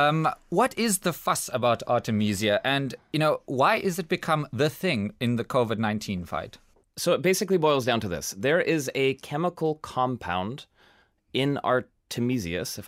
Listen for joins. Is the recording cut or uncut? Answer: uncut